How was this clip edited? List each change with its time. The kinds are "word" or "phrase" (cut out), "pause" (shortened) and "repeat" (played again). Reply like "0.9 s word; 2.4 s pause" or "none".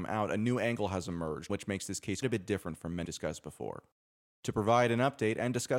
1.5 s word; 2.2 s word; 3.0 s word